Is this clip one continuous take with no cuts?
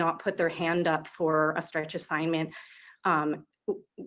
yes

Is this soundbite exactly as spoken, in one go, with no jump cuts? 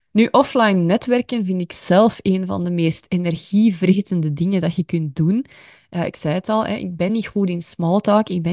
yes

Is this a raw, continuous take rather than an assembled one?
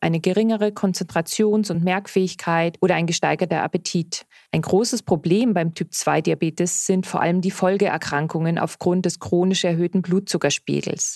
yes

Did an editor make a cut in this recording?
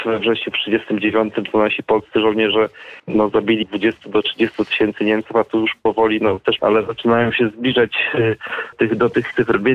yes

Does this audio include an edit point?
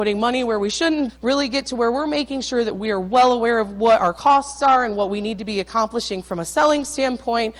yes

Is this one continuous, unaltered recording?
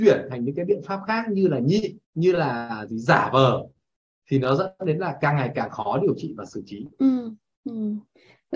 no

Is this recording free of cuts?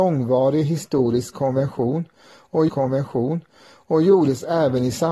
no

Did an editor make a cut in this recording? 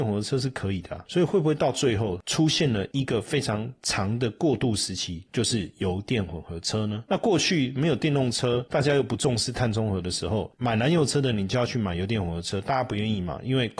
no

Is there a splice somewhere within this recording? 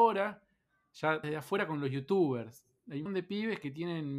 yes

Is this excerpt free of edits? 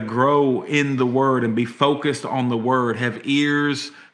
yes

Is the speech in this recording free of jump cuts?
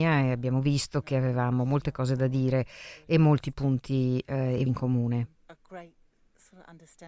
no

